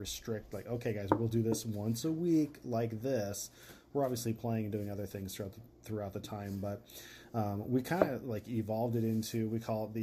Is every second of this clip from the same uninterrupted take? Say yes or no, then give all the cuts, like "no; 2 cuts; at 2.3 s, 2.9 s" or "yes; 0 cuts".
yes; 0 cuts